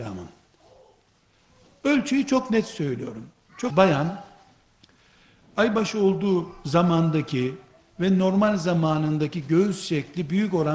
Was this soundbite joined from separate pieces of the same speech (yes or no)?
yes